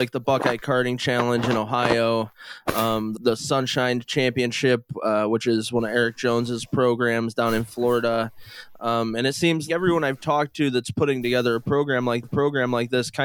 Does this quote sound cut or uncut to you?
cut